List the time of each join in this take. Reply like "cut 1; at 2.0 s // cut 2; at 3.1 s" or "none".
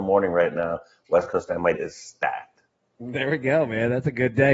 cut 1; at 1.7 s